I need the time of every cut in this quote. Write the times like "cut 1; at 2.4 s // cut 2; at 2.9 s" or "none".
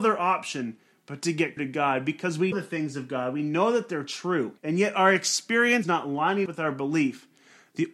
cut 1; at 1.6 s // cut 2; at 2.5 s // cut 3; at 4.6 s // cut 4; at 5.8 s // cut 5; at 6.5 s